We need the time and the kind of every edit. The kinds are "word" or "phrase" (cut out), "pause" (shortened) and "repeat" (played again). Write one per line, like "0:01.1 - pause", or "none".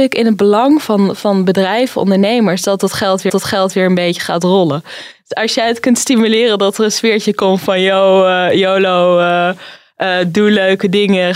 0:03.3 - repeat